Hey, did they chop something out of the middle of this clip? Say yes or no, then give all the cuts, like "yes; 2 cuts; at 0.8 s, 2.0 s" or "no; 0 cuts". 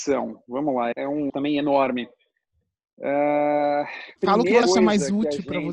yes; 4 cuts; at 0.9 s, 1.3 s, 4.2 s, 4.6 s